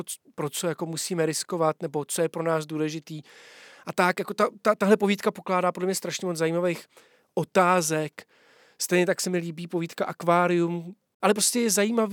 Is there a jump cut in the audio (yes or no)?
no